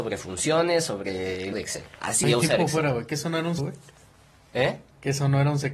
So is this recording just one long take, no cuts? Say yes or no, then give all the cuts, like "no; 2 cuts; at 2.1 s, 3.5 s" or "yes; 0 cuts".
no; 3 cuts; at 1.5 s, 2.2 s, 3.6 s